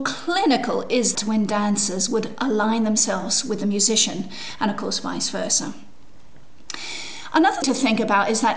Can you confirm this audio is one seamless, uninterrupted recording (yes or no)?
no